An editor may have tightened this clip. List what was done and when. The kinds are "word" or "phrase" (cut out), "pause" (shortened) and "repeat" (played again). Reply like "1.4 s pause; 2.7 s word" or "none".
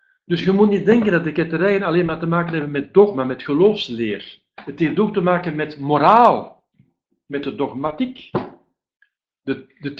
7.3 s word